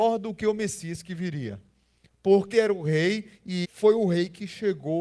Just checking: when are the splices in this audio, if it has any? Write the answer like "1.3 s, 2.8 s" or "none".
2.5 s, 3.6 s